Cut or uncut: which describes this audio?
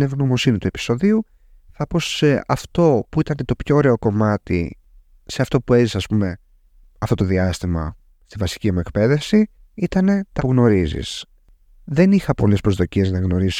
cut